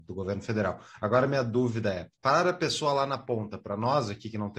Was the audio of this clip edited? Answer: yes; 1 cut; at 2.1 s

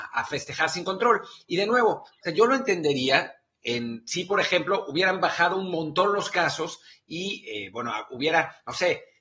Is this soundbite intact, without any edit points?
yes; 0 cuts

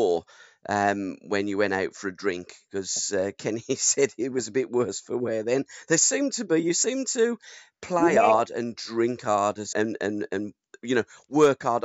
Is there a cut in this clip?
yes; 1 cut; at 9.7 s

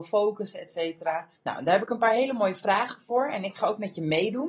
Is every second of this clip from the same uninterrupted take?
no; 1 cut; at 1.4 s

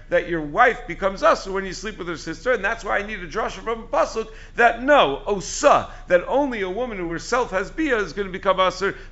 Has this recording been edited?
no; 0 cuts

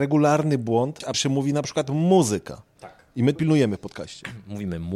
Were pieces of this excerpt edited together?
yes; 3 cuts; at 1.1 s, 2.7 s, 3.4 s

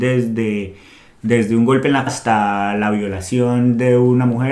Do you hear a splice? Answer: yes; 1 cut; at 2.1 s

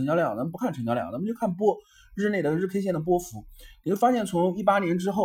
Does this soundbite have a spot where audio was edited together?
no; 0 cuts

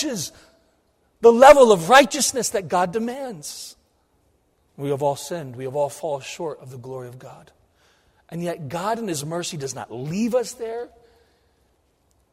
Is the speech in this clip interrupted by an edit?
yes; 1 cut; at 4.2 s

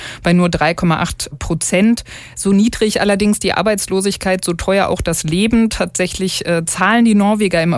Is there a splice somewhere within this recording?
no; 0 cuts

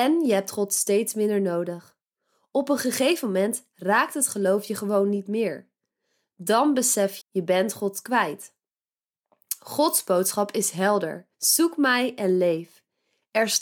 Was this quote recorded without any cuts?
no; 2 cuts; at 7.2 s, 11.3 s

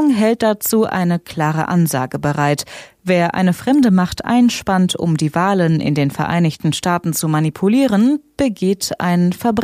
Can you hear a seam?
no; 0 cuts

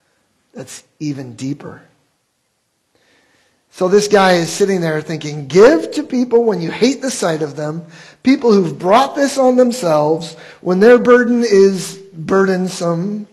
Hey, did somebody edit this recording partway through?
no; 0 cuts

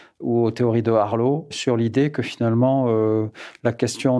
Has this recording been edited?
no; 0 cuts

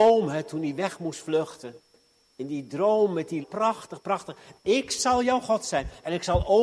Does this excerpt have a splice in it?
yes; 1 cut; at 3.4 s

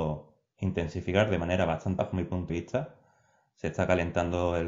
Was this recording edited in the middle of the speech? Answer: yes; 2 cuts; at 2.0 s, 2.5 s

